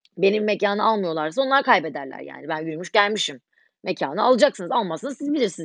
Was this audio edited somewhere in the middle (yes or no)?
no